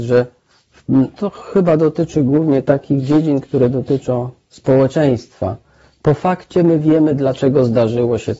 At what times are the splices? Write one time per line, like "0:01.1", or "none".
none